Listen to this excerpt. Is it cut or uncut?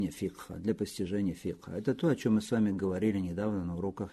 uncut